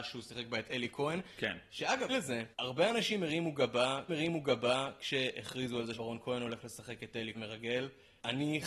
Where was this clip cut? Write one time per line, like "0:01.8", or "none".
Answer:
0:02.1
0:02.5
0:04.1
0:05.9
0:07.3